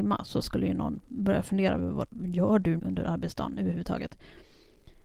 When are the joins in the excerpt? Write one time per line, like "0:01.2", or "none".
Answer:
0:02.1
0:02.8